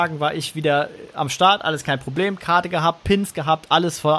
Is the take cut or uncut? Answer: uncut